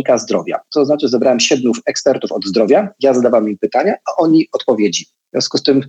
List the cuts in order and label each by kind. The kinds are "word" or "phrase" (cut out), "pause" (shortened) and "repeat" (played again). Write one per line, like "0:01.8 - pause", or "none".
none